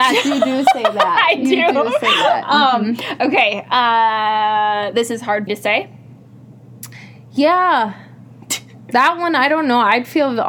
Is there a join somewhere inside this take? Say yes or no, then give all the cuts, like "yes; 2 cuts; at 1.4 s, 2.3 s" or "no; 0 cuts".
yes; 1 cut; at 5.5 s